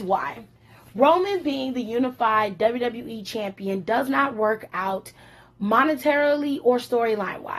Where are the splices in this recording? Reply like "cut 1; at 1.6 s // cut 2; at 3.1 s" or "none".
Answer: none